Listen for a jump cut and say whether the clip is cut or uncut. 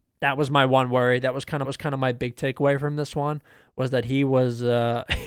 cut